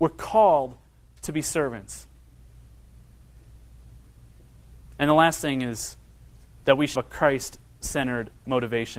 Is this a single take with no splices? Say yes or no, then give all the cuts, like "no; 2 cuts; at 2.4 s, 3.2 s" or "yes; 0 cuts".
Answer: no; 1 cut; at 7.0 s